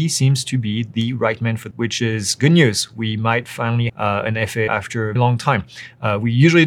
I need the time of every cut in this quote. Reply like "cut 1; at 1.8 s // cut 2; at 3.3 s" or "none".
cut 1; at 1.7 s // cut 2; at 3.9 s // cut 3; at 4.7 s // cut 4; at 5.2 s